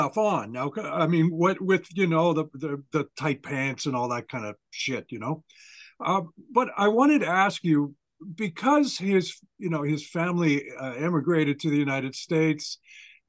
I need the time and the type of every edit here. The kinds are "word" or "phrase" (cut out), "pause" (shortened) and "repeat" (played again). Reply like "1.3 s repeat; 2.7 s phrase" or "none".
none

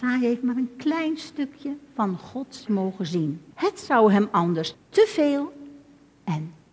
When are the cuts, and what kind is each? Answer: 2.7 s word; 3.5 s pause; 4.7 s word

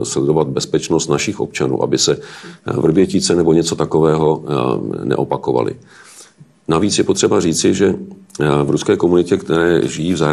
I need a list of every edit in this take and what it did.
none

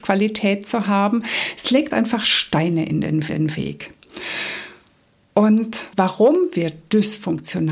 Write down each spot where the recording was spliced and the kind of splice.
1.9 s word; 3.3 s repeat; 5.9 s pause

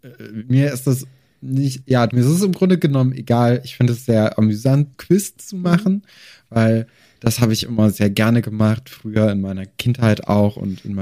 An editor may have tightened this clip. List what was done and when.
2.1 s word; 4.9 s word

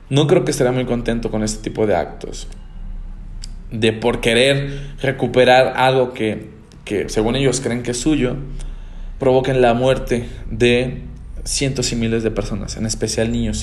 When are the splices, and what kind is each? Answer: 9.2 s word

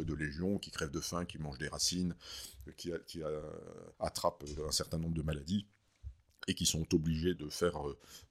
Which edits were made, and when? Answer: 3.9 s pause; 7.4 s word

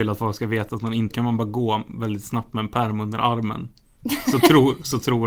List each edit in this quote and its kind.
1.1 s phrase

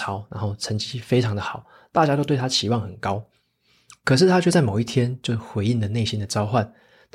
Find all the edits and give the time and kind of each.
none

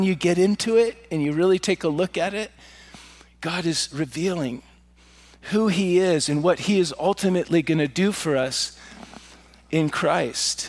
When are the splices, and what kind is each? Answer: none

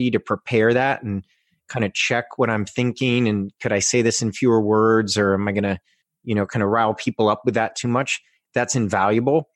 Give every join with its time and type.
none

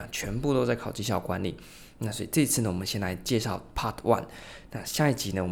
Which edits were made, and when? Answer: none

